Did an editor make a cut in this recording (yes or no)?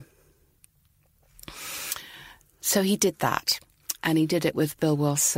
no